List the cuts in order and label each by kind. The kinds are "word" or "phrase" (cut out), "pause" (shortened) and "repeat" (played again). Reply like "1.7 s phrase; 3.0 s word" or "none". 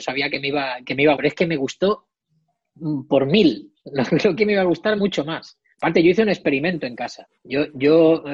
1.2 s word; 4.4 s phrase; 5.0 s word; 7.4 s pause